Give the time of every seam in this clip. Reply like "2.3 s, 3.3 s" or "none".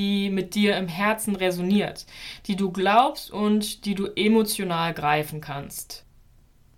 none